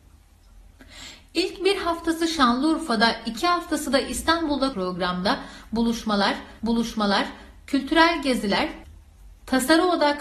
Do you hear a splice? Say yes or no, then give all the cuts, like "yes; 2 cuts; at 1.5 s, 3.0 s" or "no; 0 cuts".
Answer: yes; 2 cuts; at 4.7 s, 6.6 s